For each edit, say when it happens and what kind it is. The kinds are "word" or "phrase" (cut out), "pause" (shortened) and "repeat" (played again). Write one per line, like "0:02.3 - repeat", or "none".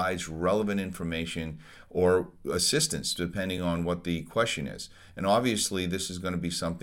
none